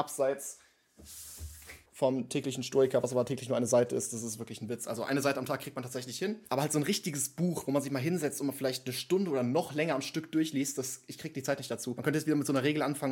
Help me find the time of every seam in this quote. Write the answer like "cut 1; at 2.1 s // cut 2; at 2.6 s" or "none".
cut 1; at 1.9 s